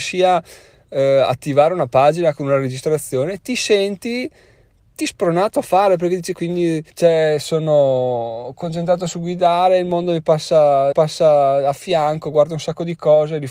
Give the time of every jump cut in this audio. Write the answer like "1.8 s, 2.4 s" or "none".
5.0 s, 6.3 s, 6.9 s, 10.9 s

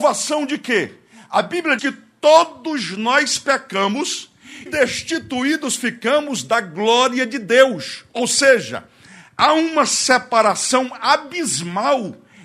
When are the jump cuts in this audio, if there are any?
1.8 s, 4.7 s

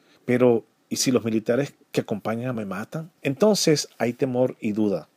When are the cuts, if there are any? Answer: 1.8 s, 2.5 s, 3.2 s

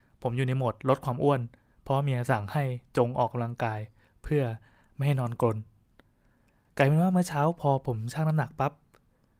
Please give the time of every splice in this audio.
none

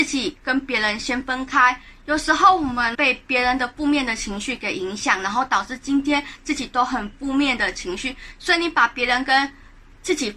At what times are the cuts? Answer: 2.9 s

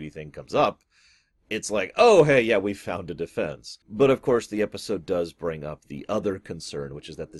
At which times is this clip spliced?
3.8 s

